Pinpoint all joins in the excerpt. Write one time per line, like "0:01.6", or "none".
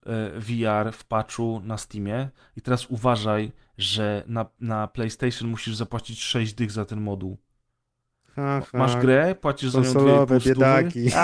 none